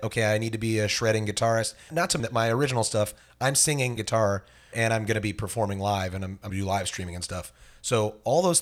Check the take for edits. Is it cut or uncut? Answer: cut